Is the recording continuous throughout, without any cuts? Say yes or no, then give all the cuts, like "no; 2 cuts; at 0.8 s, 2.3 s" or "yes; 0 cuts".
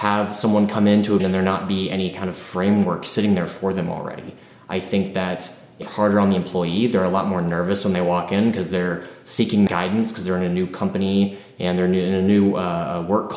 no; 3 cuts; at 1.2 s, 5.8 s, 9.7 s